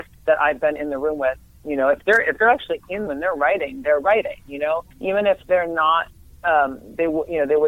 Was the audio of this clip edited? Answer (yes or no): yes